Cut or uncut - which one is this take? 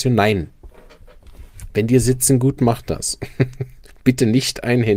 cut